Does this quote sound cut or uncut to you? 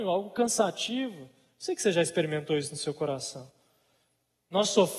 uncut